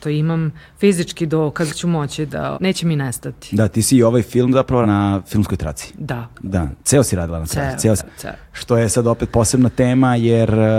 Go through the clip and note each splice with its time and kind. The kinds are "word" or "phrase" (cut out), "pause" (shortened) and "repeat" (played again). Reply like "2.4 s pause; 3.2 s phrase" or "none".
1.7 s word; 2.5 s word; 4.8 s word; 6.3 s pause; 8.0 s word